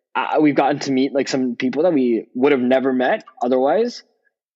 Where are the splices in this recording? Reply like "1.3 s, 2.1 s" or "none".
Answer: none